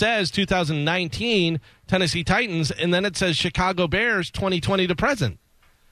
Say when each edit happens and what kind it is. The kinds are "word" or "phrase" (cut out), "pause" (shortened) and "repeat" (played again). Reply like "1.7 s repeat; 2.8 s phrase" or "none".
none